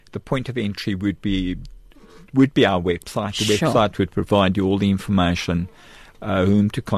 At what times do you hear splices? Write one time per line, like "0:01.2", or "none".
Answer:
none